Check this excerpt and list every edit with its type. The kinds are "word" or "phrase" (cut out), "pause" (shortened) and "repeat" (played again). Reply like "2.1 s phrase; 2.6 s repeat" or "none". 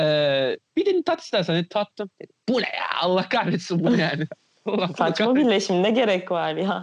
2.1 s pause